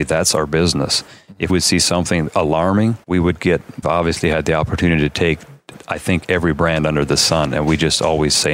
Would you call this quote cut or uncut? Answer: cut